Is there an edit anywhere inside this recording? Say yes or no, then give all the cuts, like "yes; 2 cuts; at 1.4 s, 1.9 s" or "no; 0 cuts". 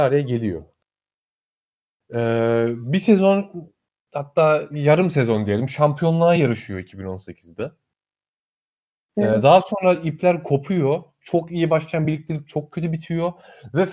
no; 0 cuts